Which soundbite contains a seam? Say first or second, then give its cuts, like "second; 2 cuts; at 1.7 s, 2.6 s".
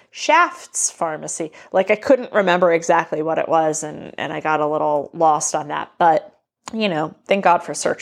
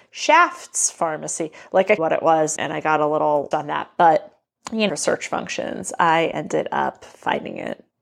second; 4 cuts; at 2.0 s, 2.6 s, 3.5 s, 4.9 s